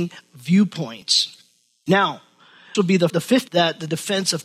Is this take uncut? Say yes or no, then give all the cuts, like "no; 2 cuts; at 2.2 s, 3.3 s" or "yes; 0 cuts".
no; 3 cuts; at 2.7 s, 3.1 s, 3.5 s